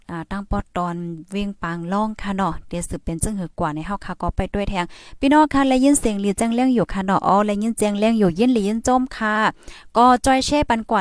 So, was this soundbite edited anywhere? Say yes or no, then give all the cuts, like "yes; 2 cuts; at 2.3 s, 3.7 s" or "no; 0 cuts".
no; 0 cuts